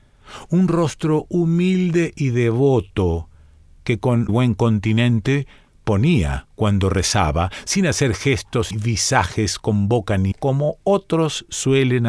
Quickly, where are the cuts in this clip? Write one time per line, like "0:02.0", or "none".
0:04.3
0:08.7
0:10.3